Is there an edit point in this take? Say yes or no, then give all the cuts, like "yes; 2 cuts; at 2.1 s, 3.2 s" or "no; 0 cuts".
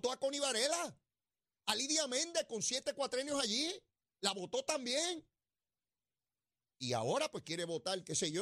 no; 0 cuts